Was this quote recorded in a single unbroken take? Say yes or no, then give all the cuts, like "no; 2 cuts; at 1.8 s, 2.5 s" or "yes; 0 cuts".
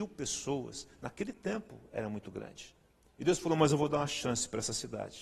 no; 1 cut; at 2.9 s